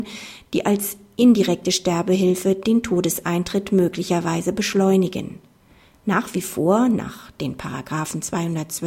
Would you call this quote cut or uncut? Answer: uncut